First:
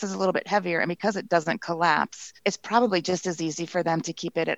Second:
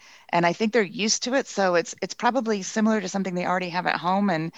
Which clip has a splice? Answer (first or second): first